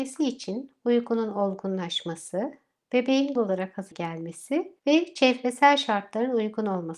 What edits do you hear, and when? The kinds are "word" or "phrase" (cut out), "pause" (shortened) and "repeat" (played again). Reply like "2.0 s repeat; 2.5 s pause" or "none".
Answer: 3.4 s word; 3.9 s word; 4.8 s pause